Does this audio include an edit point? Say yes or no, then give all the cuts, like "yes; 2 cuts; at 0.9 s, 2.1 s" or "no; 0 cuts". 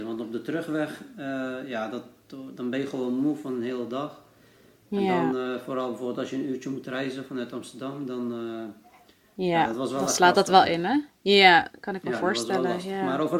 no; 0 cuts